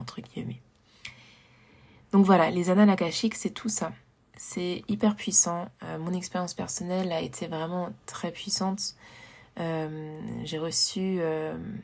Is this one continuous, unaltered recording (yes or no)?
yes